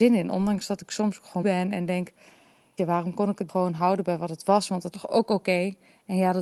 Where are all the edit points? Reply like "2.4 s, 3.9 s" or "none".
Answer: 1.4 s, 2.8 s, 3.5 s, 4.9 s